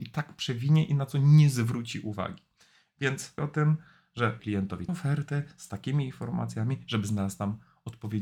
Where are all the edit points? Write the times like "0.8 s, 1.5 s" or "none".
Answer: 3.4 s, 4.4 s, 4.9 s